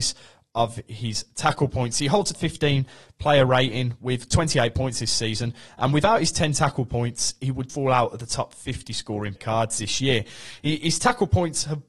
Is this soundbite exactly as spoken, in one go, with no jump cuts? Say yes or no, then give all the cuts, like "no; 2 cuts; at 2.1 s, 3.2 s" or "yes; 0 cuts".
no; 3 cuts; at 2.3 s, 7.7 s, 9.4 s